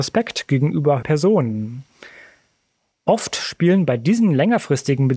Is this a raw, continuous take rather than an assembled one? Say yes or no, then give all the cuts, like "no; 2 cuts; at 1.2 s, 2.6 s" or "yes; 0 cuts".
no; 1 cut; at 1.0 s